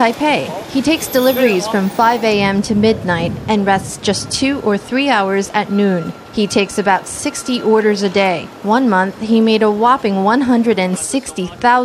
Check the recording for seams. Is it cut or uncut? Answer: uncut